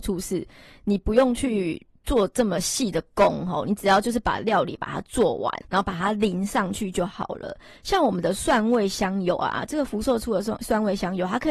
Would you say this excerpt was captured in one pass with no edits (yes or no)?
no